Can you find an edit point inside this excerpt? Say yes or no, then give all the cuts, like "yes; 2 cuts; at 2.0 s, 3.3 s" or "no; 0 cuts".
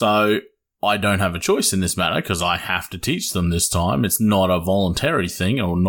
no; 0 cuts